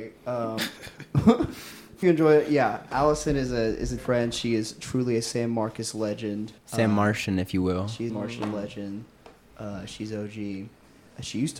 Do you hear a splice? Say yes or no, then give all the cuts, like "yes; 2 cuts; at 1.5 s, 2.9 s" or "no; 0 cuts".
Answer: yes; 5 cuts; at 2.0 s, 2.9 s, 4.0 s, 6.6 s, 8.1 s